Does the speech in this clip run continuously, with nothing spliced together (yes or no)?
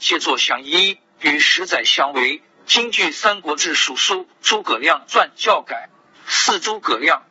yes